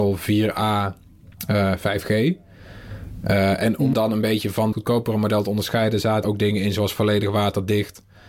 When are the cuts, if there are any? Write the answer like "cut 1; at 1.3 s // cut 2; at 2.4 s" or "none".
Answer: cut 1; at 3.9 s // cut 2; at 4.7 s // cut 3; at 6.2 s

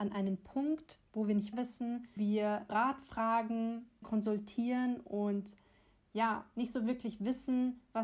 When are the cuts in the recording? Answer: cut 1; at 1.5 s // cut 2; at 2.2 s // cut 3; at 2.7 s // cut 4; at 4.0 s

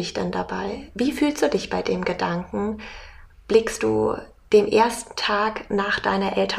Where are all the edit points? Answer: none

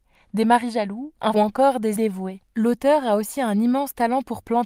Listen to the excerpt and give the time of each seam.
cut 1; at 1.3 s // cut 2; at 2.0 s // cut 3; at 2.5 s

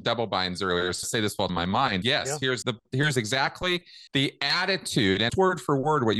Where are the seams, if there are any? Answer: cut 1; at 1.0 s // cut 2; at 1.5 s // cut 3; at 2.0 s // cut 4; at 2.6 s // cut 5; at 4.1 s // cut 6; at 5.3 s

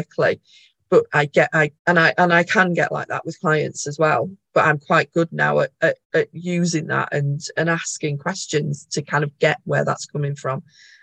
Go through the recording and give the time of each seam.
cut 1; at 1.8 s // cut 2; at 6.0 s

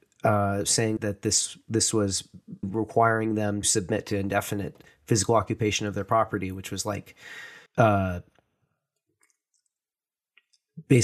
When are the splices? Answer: cut 1; at 1.0 s // cut 2; at 2.6 s // cut 3; at 3.6 s // cut 4; at 7.7 s

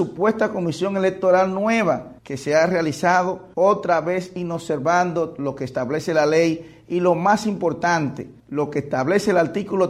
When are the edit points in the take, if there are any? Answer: cut 1; at 2.2 s // cut 2; at 3.5 s // cut 3; at 8.4 s

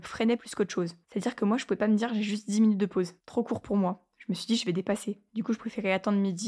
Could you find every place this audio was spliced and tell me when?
cut 1; at 1.0 s // cut 2; at 3.2 s // cut 3; at 5.3 s

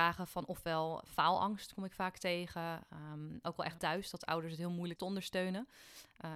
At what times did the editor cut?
cut 1; at 3.8 s // cut 2; at 5.0 s

